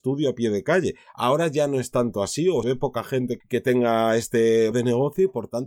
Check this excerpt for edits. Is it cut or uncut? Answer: cut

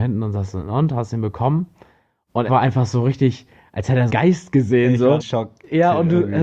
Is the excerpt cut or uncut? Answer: cut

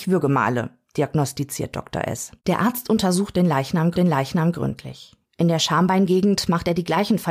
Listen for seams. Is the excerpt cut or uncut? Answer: cut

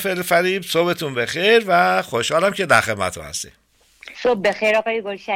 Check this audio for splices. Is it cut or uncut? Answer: cut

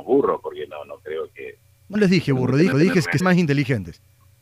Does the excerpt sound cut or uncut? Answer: cut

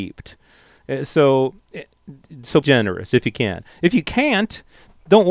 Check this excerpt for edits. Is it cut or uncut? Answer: cut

